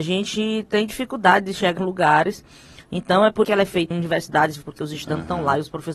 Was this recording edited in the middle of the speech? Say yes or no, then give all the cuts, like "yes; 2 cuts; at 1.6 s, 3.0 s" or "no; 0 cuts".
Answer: yes; 4 cuts; at 1.8 s, 3.4 s, 3.9 s, 4.6 s